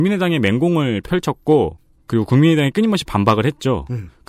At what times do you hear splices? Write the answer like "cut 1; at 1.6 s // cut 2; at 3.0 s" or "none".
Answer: none

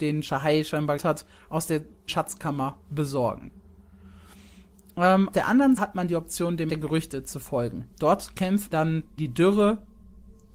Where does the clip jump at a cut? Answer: cut 1; at 1.0 s // cut 2; at 2.1 s // cut 3; at 5.3 s // cut 4; at 5.8 s // cut 5; at 6.7 s // cut 6; at 8.7 s // cut 7; at 9.2 s

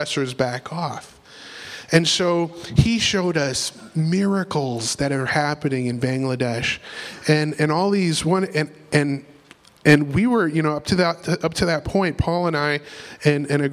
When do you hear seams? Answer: none

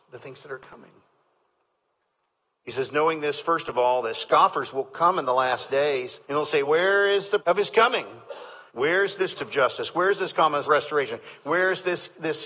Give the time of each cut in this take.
cut 1; at 6.2 s // cut 2; at 6.6 s // cut 3; at 7.4 s // cut 4; at 8.7 s // cut 5; at 9.4 s // cut 6; at 10.6 s

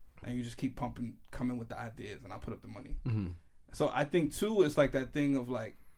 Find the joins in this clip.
none

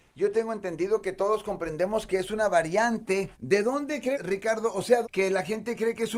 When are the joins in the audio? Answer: cut 1; at 3.3 s // cut 2; at 4.1 s // cut 3; at 5.0 s

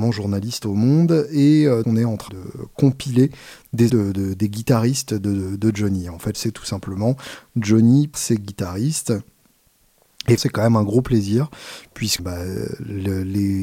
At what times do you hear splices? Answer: cut 1; at 1.8 s // cut 2; at 2.3 s // cut 3; at 3.9 s // cut 4; at 6.3 s // cut 5; at 8.1 s // cut 6; at 10.4 s // cut 7; at 12.2 s

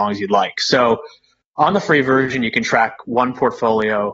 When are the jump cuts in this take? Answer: none

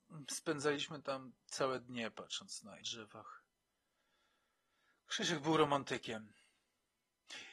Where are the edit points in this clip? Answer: cut 1; at 1.4 s // cut 2; at 2.8 s

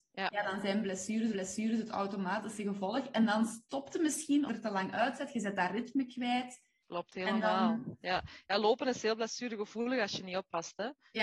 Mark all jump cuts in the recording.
cut 1; at 1.3 s // cut 2; at 4.5 s

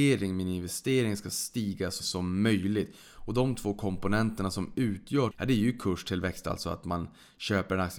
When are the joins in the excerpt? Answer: cut 1; at 2.0 s // cut 2; at 5.3 s

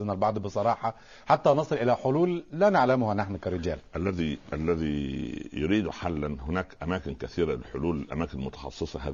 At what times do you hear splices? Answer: none

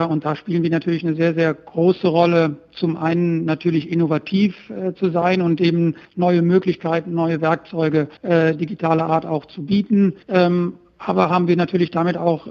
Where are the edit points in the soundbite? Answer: cut 1; at 6.0 s // cut 2; at 8.2 s // cut 3; at 10.2 s

